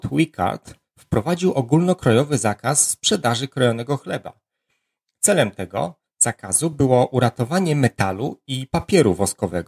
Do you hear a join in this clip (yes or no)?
no